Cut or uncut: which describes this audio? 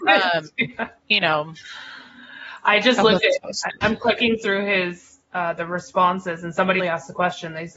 cut